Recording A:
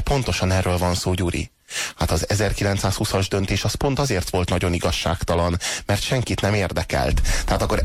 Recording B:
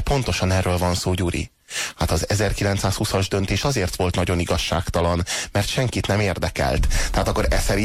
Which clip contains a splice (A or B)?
B